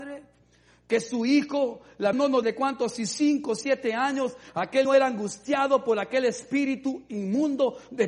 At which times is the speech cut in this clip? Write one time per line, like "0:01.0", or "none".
0:02.1
0:02.4
0:02.9
0:04.8